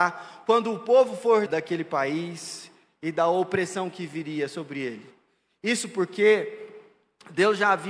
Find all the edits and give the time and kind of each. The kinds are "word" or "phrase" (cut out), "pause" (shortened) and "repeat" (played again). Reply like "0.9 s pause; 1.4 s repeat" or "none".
1.5 s phrase